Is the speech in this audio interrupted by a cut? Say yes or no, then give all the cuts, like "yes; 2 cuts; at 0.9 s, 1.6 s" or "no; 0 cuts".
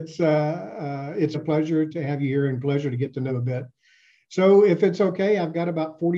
yes; 3 cuts; at 1.3 s, 1.9 s, 3.3 s